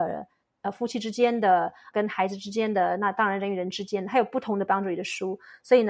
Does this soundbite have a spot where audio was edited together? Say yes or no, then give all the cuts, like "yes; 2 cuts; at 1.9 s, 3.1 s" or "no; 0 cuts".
yes; 1 cut; at 1.9 s